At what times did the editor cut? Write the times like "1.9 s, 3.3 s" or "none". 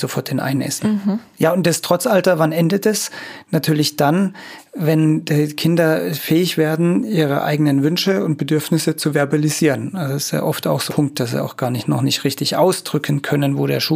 10.9 s

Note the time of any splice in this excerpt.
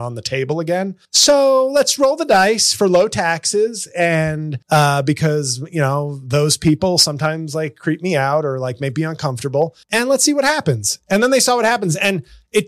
1.0 s, 4.6 s, 9.8 s

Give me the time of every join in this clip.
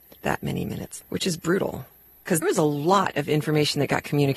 1.0 s, 2.4 s

